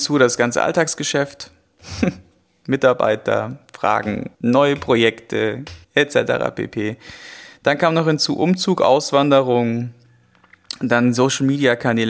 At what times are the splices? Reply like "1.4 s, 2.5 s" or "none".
4.3 s, 5.8 s